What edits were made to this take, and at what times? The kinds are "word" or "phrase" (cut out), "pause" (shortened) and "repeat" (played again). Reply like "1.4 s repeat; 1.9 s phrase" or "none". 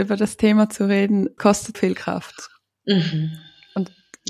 1.4 s word; 1.7 s word